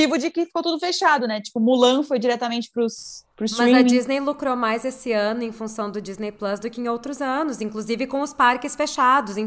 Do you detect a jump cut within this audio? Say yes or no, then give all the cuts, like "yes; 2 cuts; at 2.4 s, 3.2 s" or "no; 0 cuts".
no; 0 cuts